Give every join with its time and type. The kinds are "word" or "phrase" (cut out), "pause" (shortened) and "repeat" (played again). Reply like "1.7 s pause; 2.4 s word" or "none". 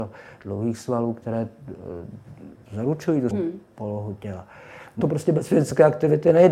2.6 s pause; 3.3 s word; 5.0 s phrase